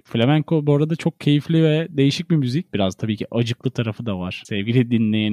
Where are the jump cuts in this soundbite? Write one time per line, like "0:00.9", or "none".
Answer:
none